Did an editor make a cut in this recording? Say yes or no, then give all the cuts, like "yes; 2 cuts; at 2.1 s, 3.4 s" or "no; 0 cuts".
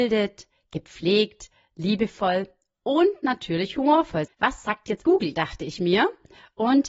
yes; 2 cuts; at 4.3 s, 5.0 s